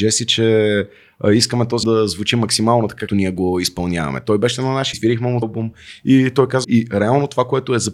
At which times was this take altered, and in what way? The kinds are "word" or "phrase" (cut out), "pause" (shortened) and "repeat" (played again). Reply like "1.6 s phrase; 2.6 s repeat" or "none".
1.8 s word; 3.1 s word; 4.9 s word; 5.4 s word; 6.6 s word